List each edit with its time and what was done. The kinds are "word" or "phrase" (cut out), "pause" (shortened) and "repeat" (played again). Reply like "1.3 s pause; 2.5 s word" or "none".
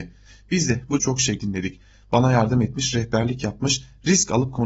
1.0 s word; 1.4 s word

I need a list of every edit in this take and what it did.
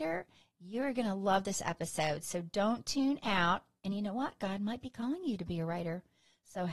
none

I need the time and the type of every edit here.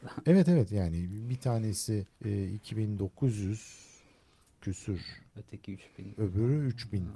2.1 s pause; 5.3 s pause

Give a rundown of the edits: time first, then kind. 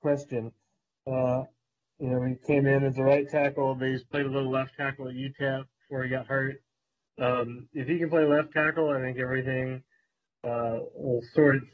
none

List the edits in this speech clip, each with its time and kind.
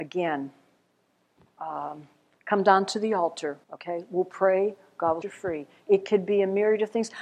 3.6 s pause; 5.2 s word

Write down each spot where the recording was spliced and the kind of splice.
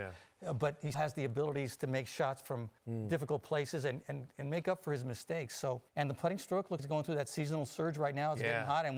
0.9 s word; 2.8 s pause; 4.0 s word; 5.9 s pause; 6.8 s word

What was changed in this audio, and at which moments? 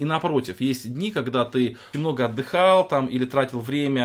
1.9 s word

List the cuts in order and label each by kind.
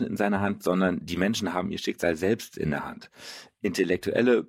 none

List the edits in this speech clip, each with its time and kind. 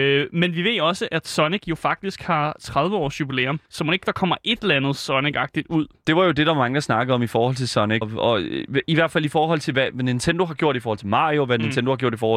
3.7 s pause; 8.0 s word

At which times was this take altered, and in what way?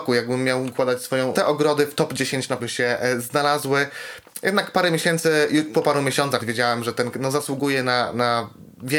1.3 s phrase; 2.6 s word; 5.7 s word; 6.4 s word; 7.1 s word

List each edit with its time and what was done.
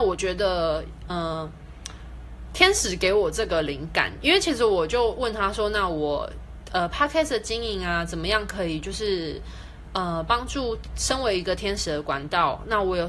1.1 s word

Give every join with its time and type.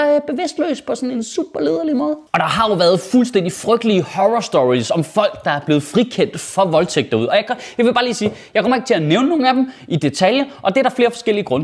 2.3 s pause

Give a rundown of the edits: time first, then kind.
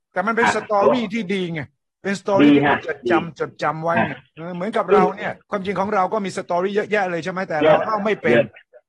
5.4 s pause

